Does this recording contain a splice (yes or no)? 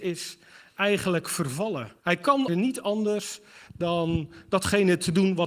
yes